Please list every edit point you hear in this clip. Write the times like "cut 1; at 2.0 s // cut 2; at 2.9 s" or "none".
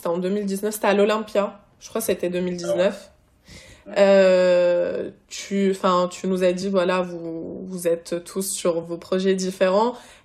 none

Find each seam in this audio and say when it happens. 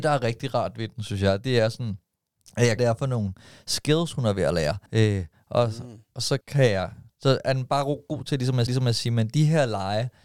cut 1; at 2.8 s // cut 2; at 4.9 s // cut 3; at 6.4 s // cut 4; at 7.1 s // cut 5; at 8.7 s

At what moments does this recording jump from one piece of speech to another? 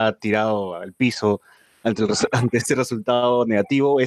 none

